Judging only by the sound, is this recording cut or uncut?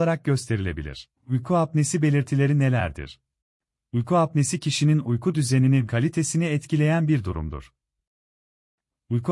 cut